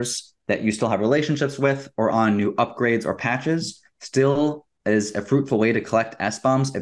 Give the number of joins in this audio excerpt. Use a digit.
0